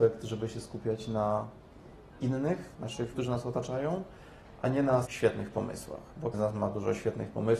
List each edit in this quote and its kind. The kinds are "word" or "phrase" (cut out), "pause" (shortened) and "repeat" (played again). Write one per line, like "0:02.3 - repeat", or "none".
0:02.1 - word
0:03.1 - word
0:05.1 - word
0:06.3 - word